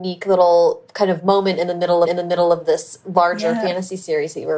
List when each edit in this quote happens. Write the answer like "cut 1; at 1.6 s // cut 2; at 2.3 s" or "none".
cut 1; at 2.0 s